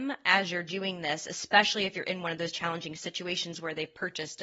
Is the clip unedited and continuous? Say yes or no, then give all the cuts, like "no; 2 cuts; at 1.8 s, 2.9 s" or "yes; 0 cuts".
yes; 0 cuts